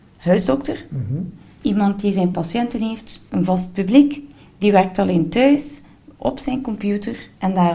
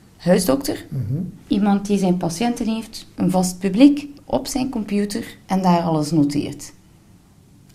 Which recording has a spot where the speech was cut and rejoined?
second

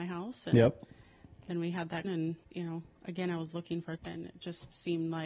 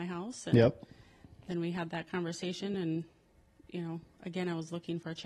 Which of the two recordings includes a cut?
first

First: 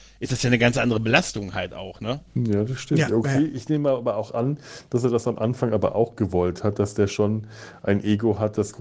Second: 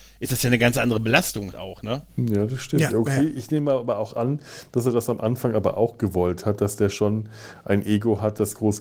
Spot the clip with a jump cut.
second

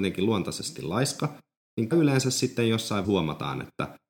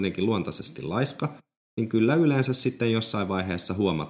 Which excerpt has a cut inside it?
first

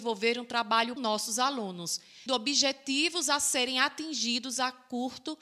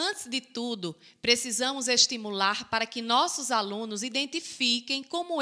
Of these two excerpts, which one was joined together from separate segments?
first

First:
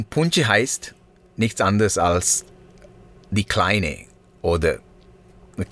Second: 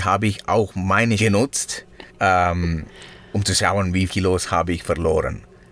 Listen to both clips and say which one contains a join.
second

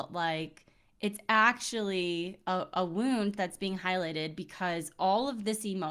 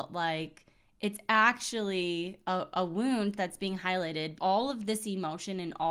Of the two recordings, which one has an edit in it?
second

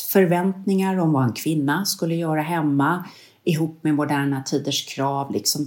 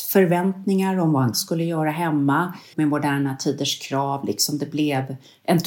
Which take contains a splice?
second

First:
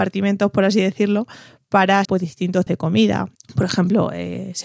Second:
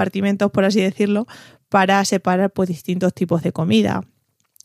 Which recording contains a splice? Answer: first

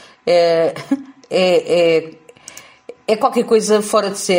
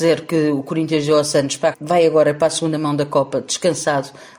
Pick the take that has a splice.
second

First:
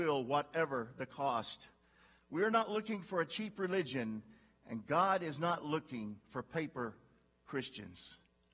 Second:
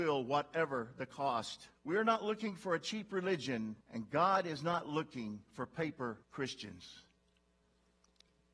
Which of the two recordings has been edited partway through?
second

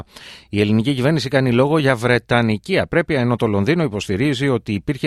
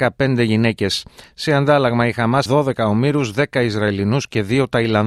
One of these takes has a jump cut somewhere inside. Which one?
second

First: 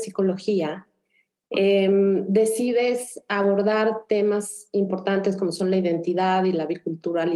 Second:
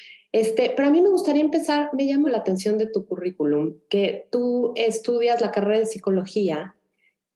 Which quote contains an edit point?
second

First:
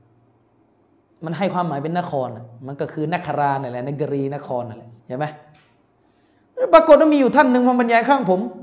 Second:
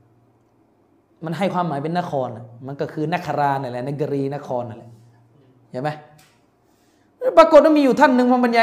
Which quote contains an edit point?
first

